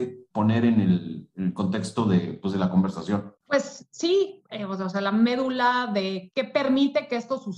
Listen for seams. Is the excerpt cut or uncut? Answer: cut